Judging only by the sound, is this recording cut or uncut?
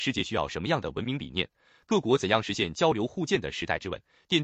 uncut